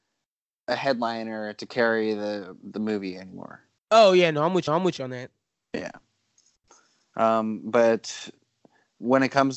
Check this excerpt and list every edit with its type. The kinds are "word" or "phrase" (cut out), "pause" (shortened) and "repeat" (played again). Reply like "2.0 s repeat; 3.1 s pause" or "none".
3.8 s pause; 4.7 s repeat